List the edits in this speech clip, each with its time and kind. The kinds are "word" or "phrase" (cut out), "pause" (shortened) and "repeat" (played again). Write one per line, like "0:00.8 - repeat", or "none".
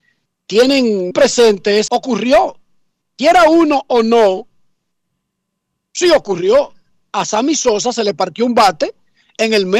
0:01.1 - word
0:01.9 - phrase